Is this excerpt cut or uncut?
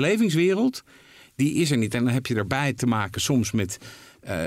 uncut